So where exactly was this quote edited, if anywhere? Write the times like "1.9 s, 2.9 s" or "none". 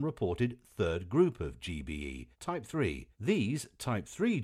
2.3 s, 3.1 s